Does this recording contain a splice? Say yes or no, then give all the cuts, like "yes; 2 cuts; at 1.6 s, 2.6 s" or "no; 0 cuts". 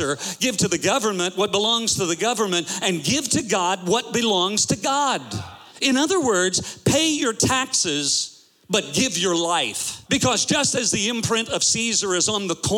yes; 2 cuts; at 5.7 s, 10.0 s